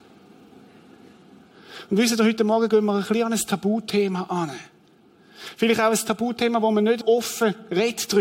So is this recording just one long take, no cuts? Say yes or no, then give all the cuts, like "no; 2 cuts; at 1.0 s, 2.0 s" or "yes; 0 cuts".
no; 1 cut; at 7.0 s